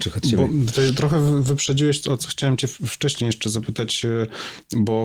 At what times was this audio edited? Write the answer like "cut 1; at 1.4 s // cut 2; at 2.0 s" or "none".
cut 1; at 2.0 s